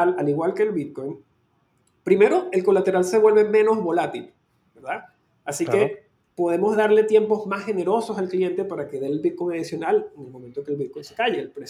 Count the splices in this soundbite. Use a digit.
0